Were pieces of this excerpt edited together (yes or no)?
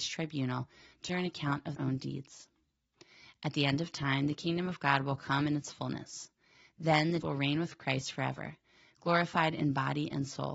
yes